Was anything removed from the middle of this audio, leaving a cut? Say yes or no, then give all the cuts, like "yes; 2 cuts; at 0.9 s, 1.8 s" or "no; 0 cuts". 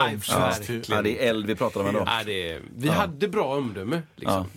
no; 0 cuts